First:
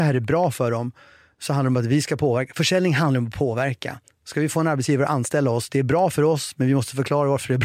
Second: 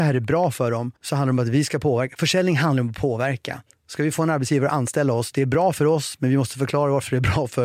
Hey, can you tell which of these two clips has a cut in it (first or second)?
second